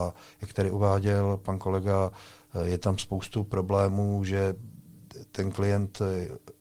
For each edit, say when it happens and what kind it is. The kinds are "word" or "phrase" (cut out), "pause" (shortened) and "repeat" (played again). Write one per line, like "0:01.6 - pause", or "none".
none